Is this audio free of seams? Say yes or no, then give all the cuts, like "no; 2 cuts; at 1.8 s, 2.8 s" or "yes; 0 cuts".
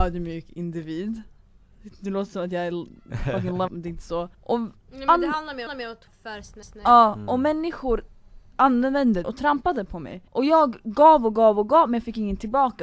no; 7 cuts; at 3.7 s, 4.3 s, 5.7 s, 6.1 s, 6.6 s, 9.2 s, 10.3 s